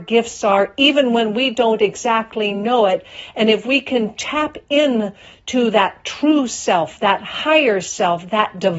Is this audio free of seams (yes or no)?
yes